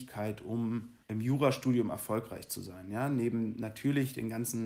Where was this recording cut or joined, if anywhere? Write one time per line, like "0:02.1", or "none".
0:01.0